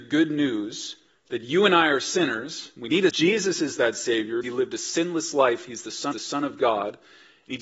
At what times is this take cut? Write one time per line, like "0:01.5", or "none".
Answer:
0:01.1
0:03.1
0:04.4
0:06.1